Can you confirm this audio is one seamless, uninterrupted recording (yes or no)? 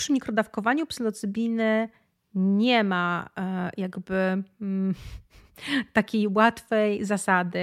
yes